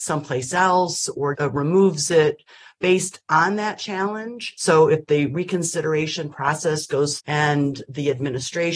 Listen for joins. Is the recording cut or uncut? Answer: cut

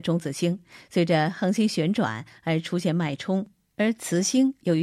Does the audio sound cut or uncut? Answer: uncut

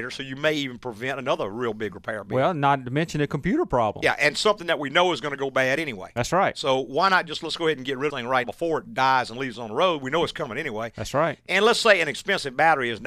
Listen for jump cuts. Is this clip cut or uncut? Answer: cut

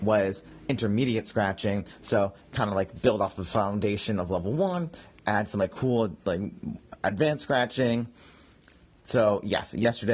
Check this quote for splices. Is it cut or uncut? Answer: uncut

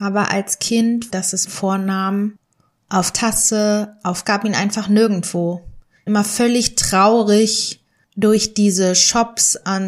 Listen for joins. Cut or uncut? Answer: cut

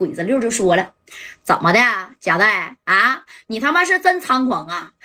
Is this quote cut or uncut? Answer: uncut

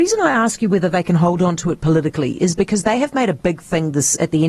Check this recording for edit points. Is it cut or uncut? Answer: uncut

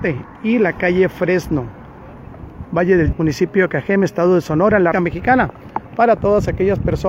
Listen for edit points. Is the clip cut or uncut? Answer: cut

